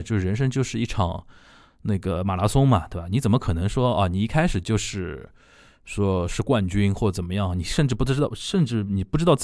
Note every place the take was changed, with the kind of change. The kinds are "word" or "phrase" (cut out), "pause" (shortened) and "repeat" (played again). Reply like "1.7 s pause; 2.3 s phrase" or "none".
none